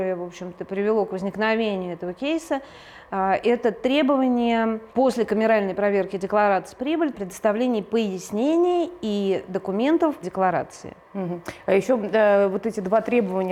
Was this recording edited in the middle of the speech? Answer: yes; 4 cuts; at 4.9 s, 6.8 s, 7.1 s, 10.2 s

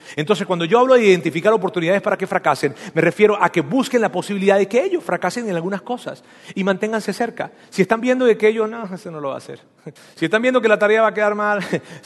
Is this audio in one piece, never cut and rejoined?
no; 1 cut; at 10.0 s

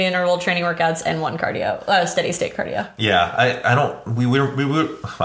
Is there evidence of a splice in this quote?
no; 0 cuts

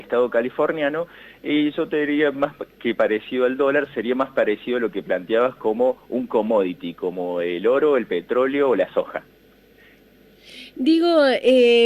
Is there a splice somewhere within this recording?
no; 0 cuts

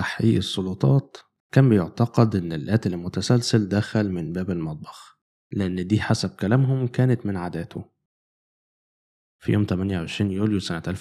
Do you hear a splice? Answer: no; 0 cuts

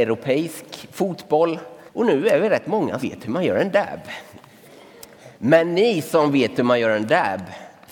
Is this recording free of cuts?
no; 3 cuts; at 1.9 s, 3.0 s, 5.3 s

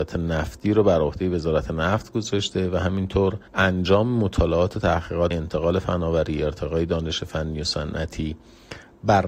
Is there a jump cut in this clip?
yes; 2 cuts; at 3.5 s, 5.3 s

